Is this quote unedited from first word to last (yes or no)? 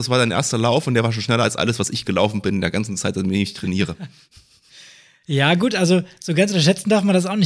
yes